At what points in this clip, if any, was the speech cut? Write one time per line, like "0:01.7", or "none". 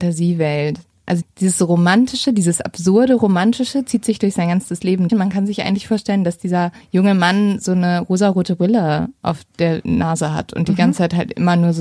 0:01.2
0:05.1
0:06.8